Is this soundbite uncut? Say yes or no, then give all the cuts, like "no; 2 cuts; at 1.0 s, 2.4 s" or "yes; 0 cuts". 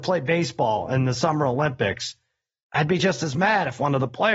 yes; 0 cuts